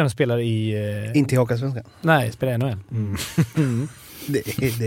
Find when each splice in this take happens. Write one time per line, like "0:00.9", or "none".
none